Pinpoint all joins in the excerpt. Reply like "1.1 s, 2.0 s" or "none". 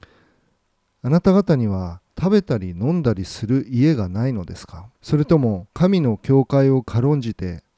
2.1 s, 5.0 s, 5.7 s